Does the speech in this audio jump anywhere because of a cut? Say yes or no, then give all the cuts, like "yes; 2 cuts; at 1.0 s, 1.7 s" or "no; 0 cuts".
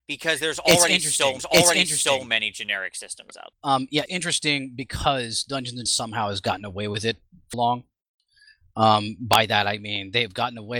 yes; 5 cuts; at 1.4 s, 3.6 s, 4.1 s, 5.9 s, 7.5 s